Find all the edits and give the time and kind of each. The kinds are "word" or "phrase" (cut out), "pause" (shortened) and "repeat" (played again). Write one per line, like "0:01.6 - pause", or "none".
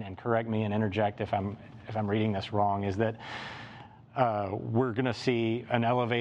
none